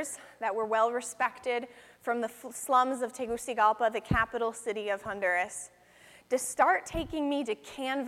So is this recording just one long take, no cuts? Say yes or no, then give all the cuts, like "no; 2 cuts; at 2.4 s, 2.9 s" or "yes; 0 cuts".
yes; 0 cuts